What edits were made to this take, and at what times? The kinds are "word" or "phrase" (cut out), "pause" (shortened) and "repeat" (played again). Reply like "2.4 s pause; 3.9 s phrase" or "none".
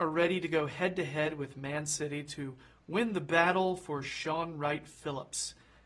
none